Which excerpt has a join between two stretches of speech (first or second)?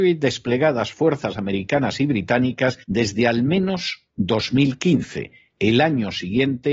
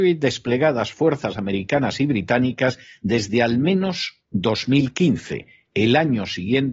first